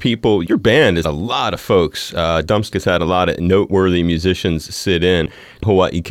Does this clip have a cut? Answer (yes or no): yes